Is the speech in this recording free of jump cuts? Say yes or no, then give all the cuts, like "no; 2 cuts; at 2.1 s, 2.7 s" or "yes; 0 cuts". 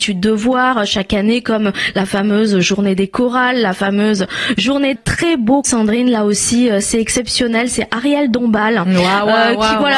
no; 2 cuts; at 5.0 s, 5.6 s